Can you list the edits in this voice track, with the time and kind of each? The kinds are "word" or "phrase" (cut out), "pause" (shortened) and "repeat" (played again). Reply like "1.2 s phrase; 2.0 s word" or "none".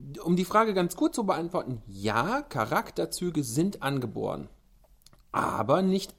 none